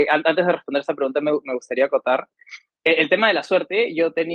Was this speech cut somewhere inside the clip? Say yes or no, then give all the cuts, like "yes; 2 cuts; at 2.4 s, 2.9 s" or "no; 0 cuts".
no; 0 cuts